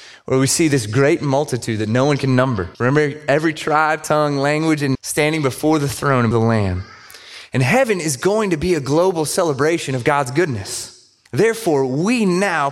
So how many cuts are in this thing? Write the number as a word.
four